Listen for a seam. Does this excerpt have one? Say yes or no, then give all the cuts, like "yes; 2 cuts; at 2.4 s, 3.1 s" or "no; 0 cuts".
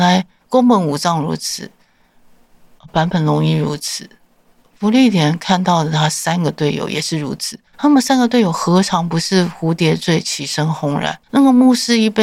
yes; 2 cuts; at 7.7 s, 11.2 s